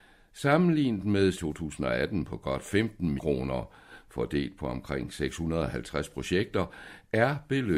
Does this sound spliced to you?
yes; 2 cuts; at 1.3 s, 3.2 s

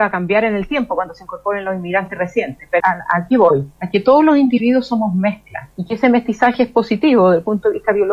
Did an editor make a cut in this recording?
yes; 3 cuts; at 2.8 s, 3.7 s, 5.7 s

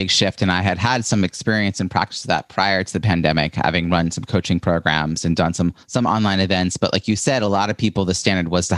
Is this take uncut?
no; 1 cut; at 5.8 s

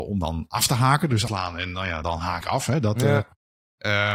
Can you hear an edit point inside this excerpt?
yes; 3 cuts; at 1.3 s, 2.0 s, 2.4 s

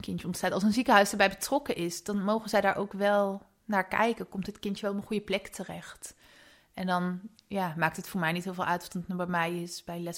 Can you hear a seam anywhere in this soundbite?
no; 0 cuts

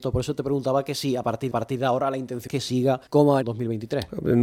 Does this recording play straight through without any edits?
no; 4 cuts; at 1.5 s, 2.5 s, 3.1 s, 3.4 s

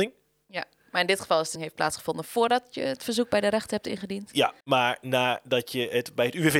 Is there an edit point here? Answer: yes; 2 cuts; at 1.6 s, 4.6 s

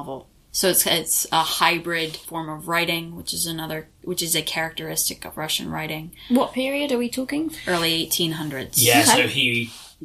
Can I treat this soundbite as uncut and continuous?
yes; 0 cuts

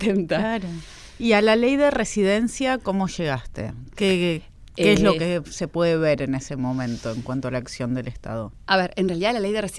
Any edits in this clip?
no; 0 cuts

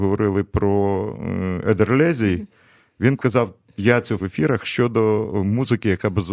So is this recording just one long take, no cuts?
no; 2 cuts; at 3.2 s, 4.2 s

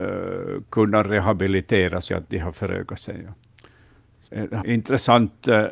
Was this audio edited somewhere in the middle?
yes; 3 cuts; at 2.1 s, 4.3 s, 4.6 s

